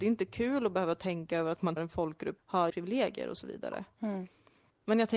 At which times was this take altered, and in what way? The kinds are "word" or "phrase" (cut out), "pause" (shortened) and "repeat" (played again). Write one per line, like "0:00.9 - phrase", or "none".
0:01.8 - word
0:02.4 - word
0:02.7 - word